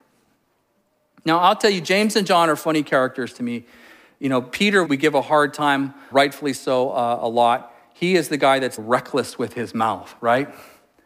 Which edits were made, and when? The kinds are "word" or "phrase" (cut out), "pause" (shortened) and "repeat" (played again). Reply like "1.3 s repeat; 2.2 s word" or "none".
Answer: 4.8 s word; 6.1 s word; 8.8 s word

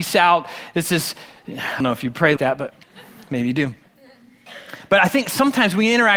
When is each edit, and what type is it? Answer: 1.8 s word; 2.4 s word; 2.8 s pause

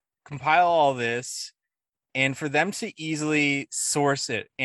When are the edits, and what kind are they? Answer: none

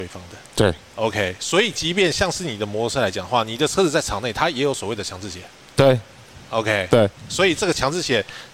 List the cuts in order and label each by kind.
7.2 s pause

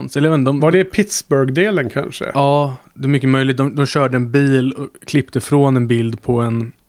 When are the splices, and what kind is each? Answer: none

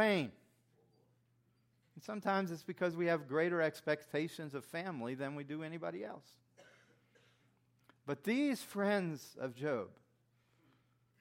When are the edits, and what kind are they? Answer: none

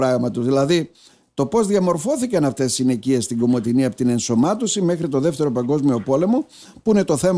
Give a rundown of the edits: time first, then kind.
none

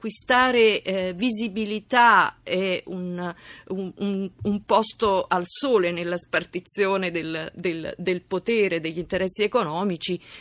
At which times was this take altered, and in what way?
none

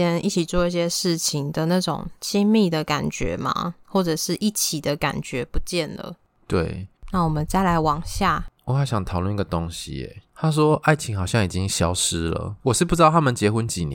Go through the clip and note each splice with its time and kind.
2.1 s pause; 8.6 s pause; 10.3 s pause; 12.6 s pause

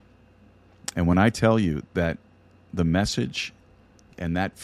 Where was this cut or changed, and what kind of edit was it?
none

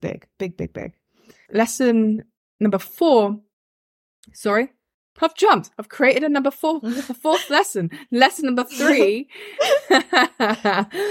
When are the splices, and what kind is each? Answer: 1.4 s word

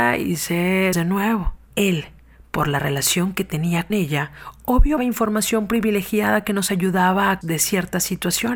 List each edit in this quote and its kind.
0.9 s word; 1.6 s pause; 3.9 s word; 5.0 s word; 7.4 s word

